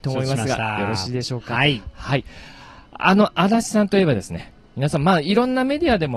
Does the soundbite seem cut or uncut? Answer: uncut